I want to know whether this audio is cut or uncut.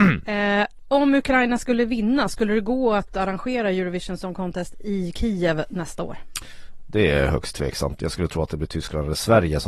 uncut